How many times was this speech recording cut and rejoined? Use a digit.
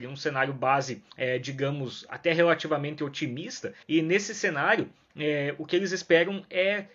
2